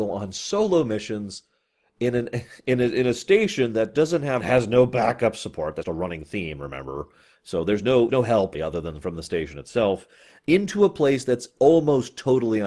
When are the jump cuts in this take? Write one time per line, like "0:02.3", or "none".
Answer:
0:04.4
0:05.8
0:08.1
0:08.5